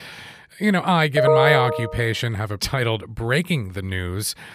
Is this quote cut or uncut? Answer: cut